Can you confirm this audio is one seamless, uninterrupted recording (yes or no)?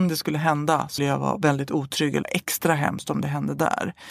no